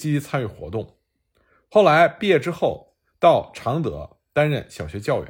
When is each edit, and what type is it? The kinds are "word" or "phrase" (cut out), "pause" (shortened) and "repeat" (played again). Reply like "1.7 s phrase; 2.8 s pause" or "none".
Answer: none